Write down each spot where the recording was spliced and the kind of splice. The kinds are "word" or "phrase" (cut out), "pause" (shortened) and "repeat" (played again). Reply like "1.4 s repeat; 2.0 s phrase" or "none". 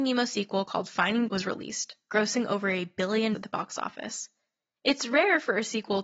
1.3 s word; 3.3 s word

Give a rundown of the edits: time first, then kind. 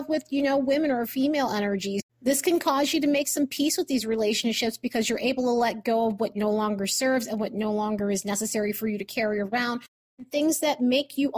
2.1 s pause

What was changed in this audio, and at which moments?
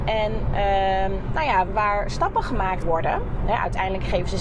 1.7 s word; 2.8 s word

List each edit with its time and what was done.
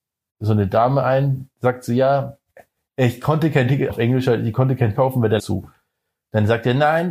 2.5 s pause; 3.9 s word; 4.9 s word; 5.4 s word

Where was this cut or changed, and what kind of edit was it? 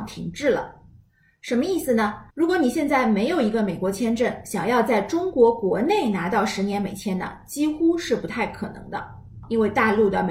2.3 s pause

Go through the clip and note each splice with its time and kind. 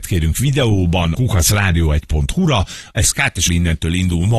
1.1 s phrase; 3.1 s word; 3.5 s word

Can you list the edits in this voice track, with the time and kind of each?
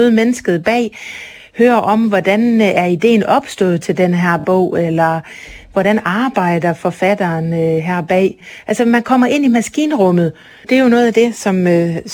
none

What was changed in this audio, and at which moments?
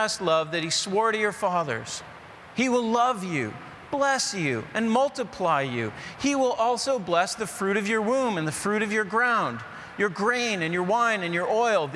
none

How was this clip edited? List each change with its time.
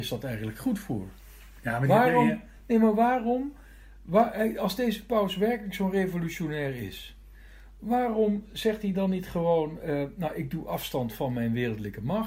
none

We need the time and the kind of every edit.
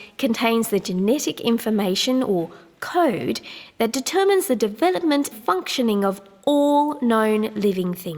5.3 s word

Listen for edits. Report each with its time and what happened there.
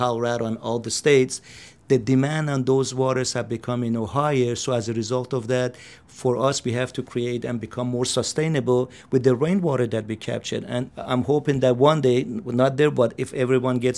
10.9 s word

